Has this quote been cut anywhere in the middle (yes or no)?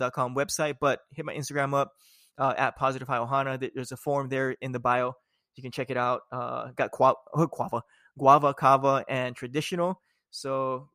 no